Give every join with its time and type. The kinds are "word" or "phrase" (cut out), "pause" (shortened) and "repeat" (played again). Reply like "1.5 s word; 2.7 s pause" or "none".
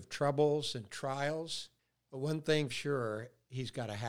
1.8 s pause; 2.7 s word